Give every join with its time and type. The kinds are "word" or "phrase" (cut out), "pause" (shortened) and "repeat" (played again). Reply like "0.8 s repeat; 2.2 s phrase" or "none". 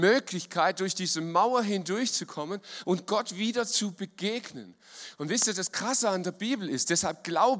none